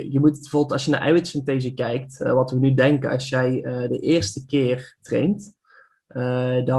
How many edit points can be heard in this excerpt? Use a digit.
0